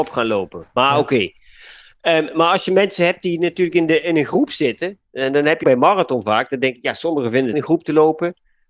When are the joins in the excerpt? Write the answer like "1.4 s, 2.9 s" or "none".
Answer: 5.6 s, 7.5 s